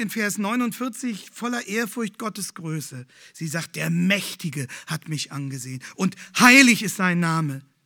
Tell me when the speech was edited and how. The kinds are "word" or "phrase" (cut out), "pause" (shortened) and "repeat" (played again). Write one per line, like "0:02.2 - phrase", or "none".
none